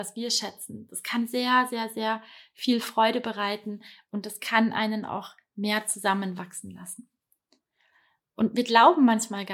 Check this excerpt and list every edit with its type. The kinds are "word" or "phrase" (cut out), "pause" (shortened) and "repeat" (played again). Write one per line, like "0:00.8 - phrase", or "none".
none